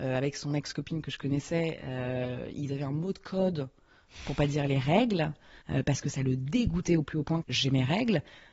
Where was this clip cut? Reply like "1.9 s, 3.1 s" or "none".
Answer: 5.6 s, 7.4 s